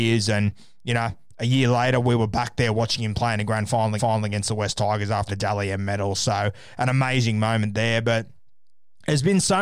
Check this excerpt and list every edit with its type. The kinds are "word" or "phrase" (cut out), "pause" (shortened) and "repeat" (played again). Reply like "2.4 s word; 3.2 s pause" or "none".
4.0 s repeat; 5.3 s word